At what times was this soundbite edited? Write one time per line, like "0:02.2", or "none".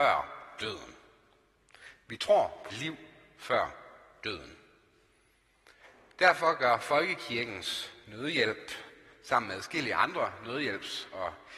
0:02.7